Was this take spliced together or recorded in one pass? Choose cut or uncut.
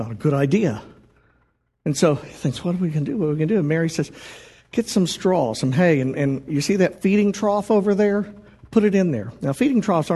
uncut